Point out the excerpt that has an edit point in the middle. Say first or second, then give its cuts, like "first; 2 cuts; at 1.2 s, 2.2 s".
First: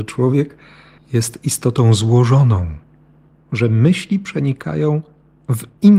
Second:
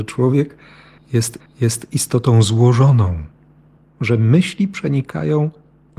second; 1 cut; at 1.4 s